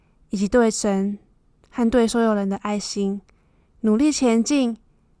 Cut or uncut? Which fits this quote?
uncut